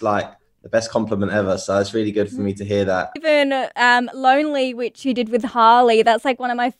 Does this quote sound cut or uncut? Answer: uncut